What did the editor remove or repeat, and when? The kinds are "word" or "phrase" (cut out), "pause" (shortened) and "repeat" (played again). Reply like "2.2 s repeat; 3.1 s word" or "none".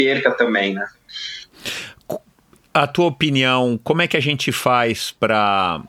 none